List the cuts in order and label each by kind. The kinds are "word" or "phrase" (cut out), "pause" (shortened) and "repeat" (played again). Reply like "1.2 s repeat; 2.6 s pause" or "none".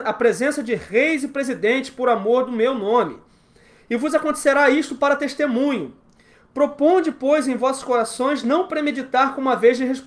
none